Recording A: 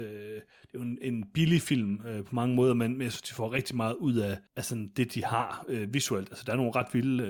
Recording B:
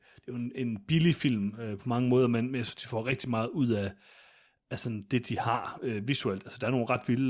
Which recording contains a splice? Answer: A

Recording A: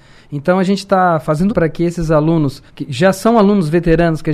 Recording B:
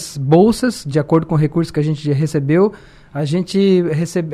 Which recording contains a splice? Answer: A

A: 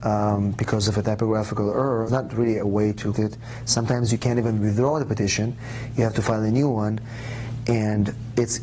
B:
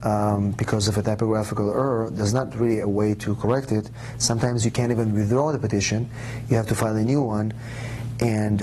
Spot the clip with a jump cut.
A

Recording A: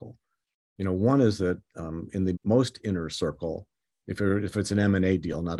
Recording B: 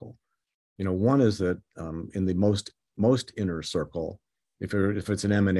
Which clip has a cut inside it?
A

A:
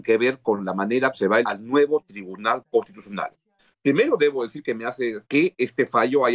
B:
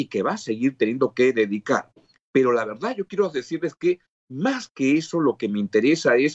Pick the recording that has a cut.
A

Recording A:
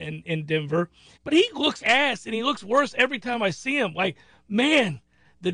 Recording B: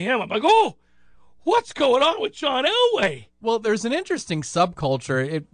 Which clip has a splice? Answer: A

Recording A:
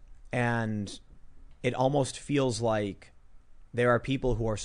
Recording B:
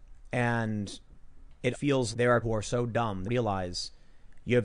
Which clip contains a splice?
B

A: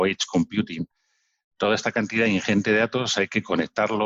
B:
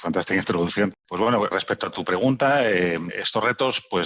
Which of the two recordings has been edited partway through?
B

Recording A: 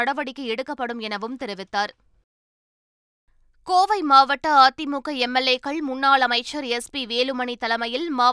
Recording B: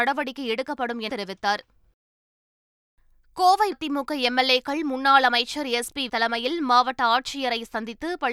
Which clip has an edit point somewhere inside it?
B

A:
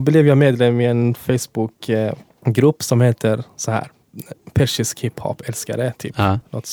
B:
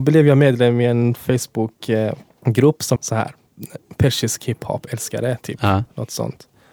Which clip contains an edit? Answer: B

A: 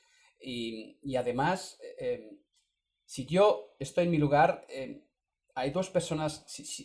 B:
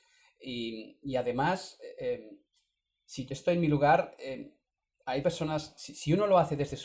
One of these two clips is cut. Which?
B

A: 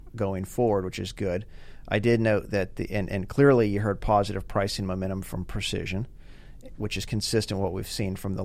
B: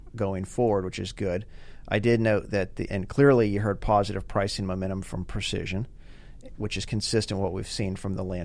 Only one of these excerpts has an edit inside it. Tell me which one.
B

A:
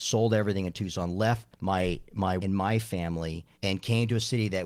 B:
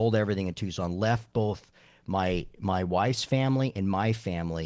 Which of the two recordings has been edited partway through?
A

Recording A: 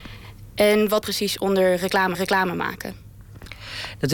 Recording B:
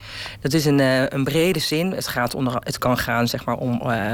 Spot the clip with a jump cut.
A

